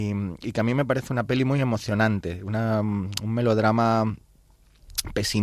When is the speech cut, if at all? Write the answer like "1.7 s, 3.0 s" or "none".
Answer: none